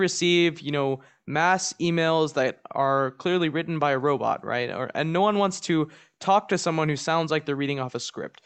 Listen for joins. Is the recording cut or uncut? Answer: uncut